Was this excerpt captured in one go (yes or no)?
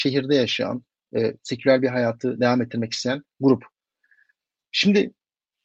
yes